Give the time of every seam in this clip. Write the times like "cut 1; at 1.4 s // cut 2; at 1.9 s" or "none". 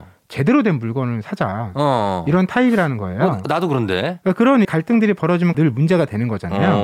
cut 1; at 4.6 s // cut 2; at 5.5 s